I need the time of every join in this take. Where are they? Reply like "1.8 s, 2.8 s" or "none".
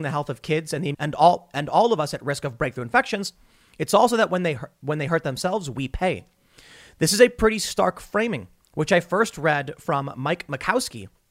0.9 s